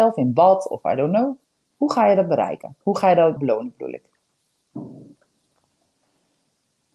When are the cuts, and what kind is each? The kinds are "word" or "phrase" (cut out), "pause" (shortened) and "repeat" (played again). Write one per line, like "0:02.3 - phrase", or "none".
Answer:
0:01.4 - pause
0:02.8 - pause
0:03.4 - word